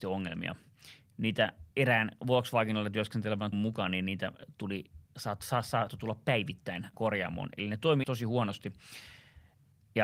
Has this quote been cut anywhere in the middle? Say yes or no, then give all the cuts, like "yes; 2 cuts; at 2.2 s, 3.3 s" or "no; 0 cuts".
yes; 6 cuts; at 1.7 s, 3.5 s, 5.1 s, 5.9 s, 6.9 s, 8.0 s